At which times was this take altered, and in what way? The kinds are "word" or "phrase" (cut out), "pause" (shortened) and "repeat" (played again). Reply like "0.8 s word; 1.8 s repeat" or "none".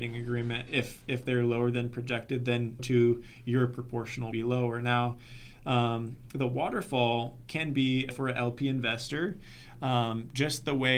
2.8 s word; 4.3 s phrase; 8.1 s phrase